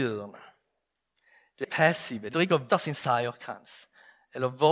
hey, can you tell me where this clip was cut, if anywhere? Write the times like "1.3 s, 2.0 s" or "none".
1.6 s, 2.3 s, 2.7 s

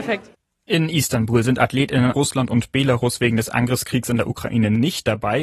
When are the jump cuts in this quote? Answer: 2.1 s

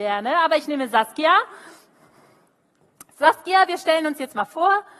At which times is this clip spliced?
none

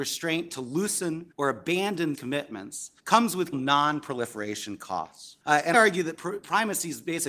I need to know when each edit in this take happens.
1.3 s, 2.1 s, 3.0 s, 3.5 s, 5.4 s, 5.7 s

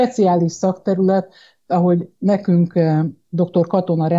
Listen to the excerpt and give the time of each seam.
none

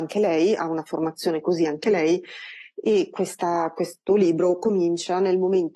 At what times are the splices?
none

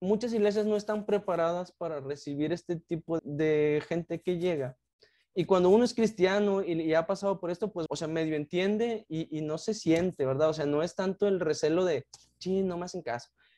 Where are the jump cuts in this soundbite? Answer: 3.2 s, 7.9 s, 9.1 s

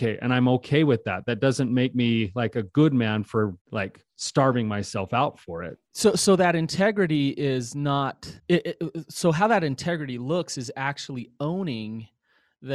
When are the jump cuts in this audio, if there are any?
3.6 s, 8.4 s

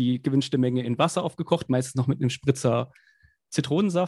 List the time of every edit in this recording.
none

